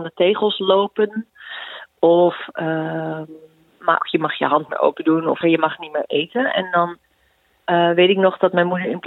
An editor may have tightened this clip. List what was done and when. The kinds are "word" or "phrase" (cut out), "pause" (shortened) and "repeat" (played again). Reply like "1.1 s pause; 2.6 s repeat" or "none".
4.0 s word; 4.7 s word; 5.4 s word